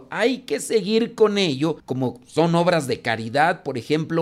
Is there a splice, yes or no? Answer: yes